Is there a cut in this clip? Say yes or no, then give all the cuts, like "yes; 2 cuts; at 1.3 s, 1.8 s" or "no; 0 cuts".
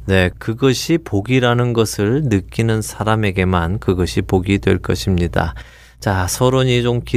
no; 0 cuts